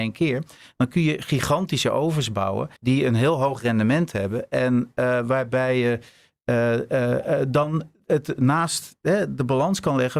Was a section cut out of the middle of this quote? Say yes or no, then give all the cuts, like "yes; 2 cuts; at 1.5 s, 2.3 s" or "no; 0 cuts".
yes; 1 cut; at 2.8 s